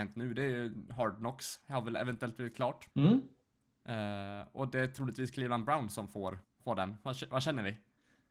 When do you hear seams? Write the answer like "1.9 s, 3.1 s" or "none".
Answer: 2.9 s, 6.4 s